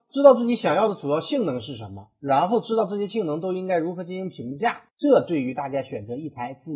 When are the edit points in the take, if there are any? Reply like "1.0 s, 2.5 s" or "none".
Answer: 4.9 s